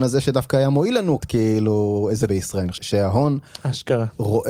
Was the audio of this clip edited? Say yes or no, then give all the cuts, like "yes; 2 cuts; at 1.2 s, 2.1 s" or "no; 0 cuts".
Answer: yes; 3 cuts; at 1.2 s, 2.3 s, 2.8 s